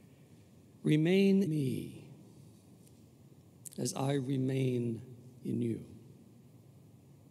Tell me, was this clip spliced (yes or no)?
yes